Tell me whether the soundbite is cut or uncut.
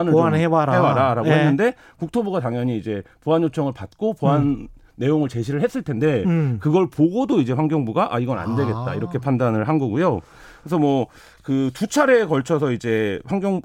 uncut